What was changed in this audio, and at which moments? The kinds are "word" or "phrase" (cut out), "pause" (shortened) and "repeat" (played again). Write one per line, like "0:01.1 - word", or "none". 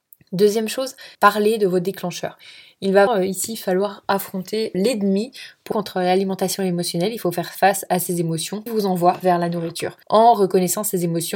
0:01.1 - pause
0:03.1 - word
0:04.7 - word
0:05.7 - word
0:08.7 - word
0:10.0 - pause